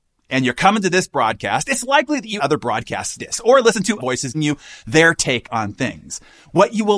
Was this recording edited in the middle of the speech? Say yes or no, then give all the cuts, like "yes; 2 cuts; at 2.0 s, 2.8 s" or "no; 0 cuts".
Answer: yes; 4 cuts; at 2.4 s, 3.2 s, 4.0 s, 4.3 s